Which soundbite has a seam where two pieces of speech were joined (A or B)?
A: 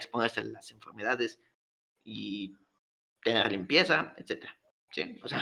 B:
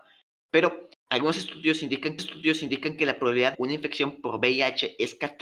B